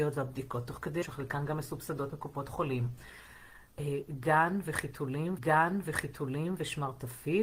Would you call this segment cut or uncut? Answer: cut